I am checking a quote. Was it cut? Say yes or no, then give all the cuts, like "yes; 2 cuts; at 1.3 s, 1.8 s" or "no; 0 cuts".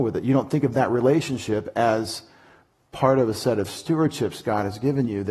no; 0 cuts